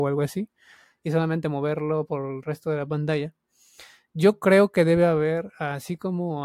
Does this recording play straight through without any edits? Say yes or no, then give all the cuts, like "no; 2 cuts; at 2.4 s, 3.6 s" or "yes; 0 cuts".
yes; 0 cuts